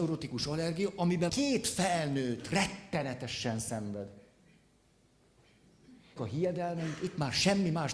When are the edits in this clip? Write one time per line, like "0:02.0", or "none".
0:01.3
0:06.2